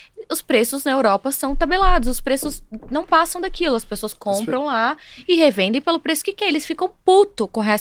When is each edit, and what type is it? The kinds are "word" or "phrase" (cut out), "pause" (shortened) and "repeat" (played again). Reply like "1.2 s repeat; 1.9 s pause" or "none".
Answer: none